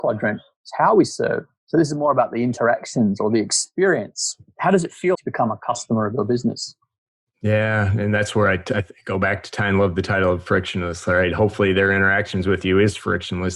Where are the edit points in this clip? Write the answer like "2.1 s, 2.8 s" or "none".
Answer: 5.1 s